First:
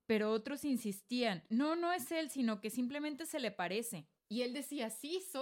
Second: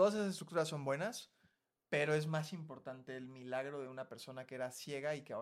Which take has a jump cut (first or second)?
first